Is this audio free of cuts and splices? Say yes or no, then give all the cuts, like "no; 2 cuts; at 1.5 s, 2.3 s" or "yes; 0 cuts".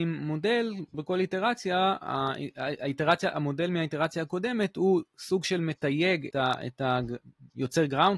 no; 2 cuts; at 0.9 s, 6.3 s